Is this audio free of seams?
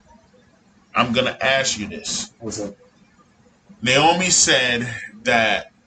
yes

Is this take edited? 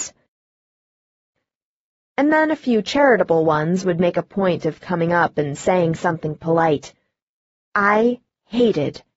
no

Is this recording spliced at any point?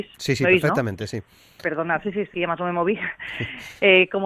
yes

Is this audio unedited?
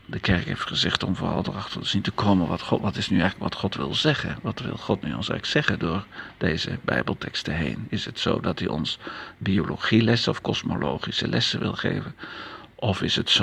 yes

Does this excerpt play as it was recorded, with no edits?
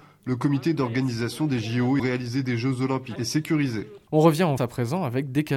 no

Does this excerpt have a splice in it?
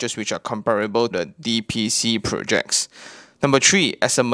yes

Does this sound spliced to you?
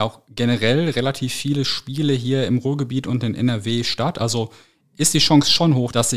no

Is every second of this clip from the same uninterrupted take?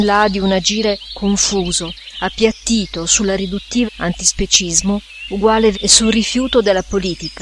no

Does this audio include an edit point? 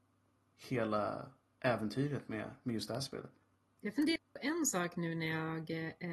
no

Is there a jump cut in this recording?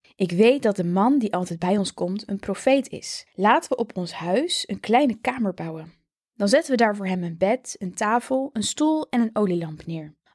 no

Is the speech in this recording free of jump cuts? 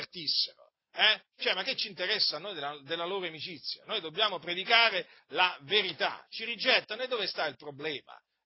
no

